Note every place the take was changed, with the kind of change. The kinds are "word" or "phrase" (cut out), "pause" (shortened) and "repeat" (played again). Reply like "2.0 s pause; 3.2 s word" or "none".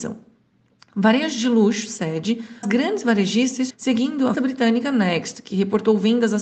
2.6 s word; 3.7 s word; 4.3 s word